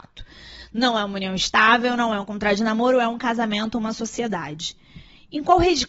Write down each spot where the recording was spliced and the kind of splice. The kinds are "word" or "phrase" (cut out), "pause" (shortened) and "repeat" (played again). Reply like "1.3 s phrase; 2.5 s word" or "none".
none